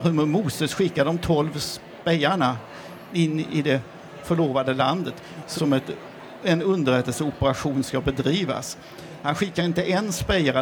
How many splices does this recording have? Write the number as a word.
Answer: one